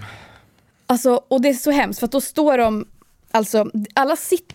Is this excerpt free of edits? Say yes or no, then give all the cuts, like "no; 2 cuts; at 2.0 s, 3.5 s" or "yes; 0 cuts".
yes; 0 cuts